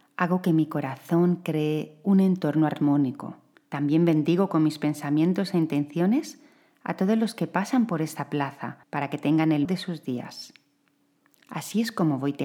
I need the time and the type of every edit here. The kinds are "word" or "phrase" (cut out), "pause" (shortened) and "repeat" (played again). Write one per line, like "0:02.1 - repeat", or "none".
0:03.5 - pause
0:08.8 - pause
0:09.6 - word